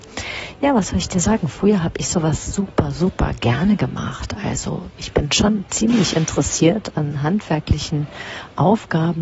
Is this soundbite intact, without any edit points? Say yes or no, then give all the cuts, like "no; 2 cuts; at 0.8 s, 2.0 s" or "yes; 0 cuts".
yes; 0 cuts